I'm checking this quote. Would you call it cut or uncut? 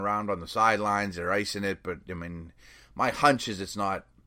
uncut